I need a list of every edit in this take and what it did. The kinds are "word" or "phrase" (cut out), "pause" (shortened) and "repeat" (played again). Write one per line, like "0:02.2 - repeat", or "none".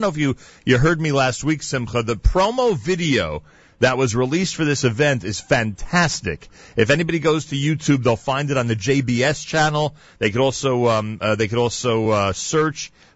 none